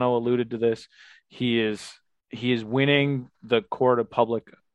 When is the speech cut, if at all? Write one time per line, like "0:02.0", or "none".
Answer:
none

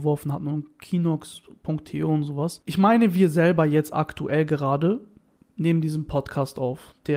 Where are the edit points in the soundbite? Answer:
none

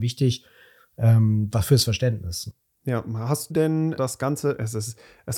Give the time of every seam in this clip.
0:03.5
0:04.0

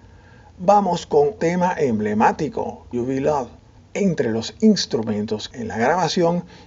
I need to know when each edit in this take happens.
0:01.4
0:02.9
0:03.8
0:05.5

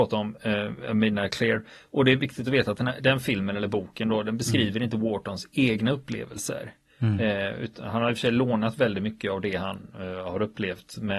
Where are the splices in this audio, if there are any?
none

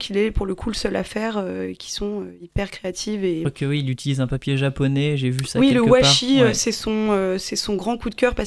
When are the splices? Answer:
none

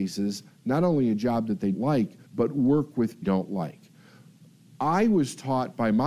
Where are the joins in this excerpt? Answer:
0:01.7
0:02.3
0:03.2

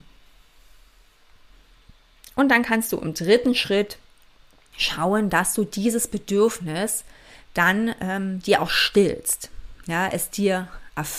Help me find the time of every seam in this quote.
none

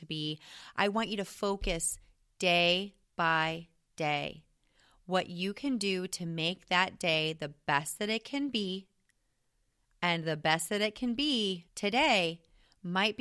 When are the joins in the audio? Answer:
0:03.0
0:11.7

